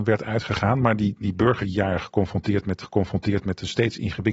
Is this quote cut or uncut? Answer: cut